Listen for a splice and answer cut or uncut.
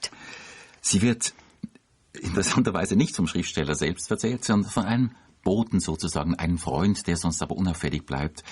uncut